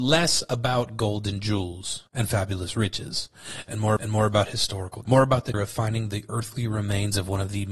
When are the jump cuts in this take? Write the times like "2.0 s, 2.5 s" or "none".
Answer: 2.1 s, 4.0 s, 5.0 s, 5.5 s